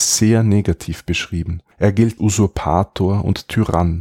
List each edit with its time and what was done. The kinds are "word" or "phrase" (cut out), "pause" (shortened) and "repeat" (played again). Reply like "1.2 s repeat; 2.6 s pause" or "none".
1.7 s pause; 2.2 s word